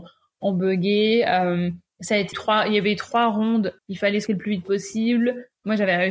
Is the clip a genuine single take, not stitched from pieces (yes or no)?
no